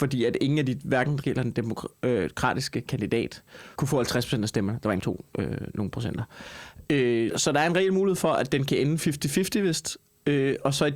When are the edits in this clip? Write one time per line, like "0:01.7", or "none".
0:01.2
0:03.8
0:05.0
0:07.3